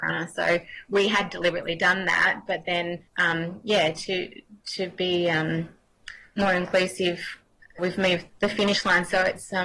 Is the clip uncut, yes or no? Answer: no